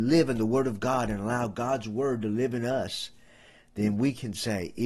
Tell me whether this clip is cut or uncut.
uncut